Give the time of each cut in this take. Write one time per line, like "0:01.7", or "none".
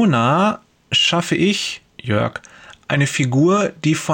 0:01.9